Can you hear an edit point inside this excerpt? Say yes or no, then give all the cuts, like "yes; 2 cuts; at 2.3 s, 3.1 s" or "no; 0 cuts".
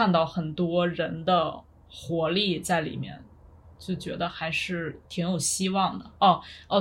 no; 0 cuts